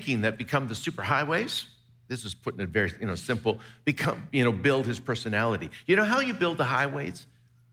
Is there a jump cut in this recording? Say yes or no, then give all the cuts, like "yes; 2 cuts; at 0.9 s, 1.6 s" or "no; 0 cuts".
no; 0 cuts